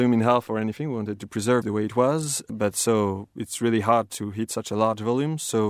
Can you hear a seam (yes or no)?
yes